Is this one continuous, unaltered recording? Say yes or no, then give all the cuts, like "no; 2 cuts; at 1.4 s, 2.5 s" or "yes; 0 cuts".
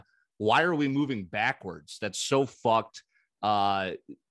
yes; 0 cuts